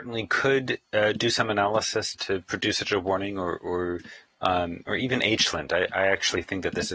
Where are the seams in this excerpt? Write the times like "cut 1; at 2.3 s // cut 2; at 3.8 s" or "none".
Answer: cut 1; at 2.1 s